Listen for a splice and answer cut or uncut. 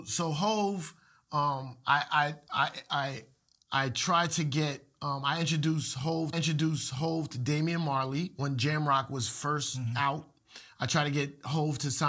cut